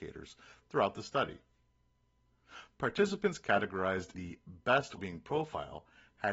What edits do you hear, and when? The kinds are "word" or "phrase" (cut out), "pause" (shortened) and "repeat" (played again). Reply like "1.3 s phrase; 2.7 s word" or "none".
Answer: 4.1 s word; 5.0 s word